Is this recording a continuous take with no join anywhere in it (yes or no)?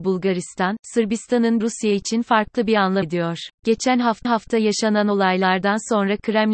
no